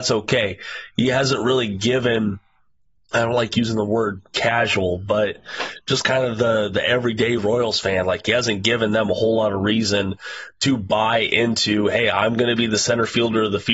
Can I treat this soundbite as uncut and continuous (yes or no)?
yes